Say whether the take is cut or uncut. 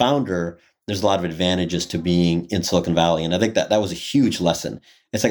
uncut